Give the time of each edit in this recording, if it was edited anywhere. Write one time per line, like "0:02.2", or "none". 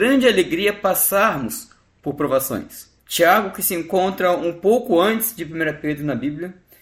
0:03.0